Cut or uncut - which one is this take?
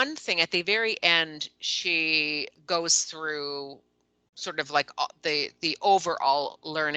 uncut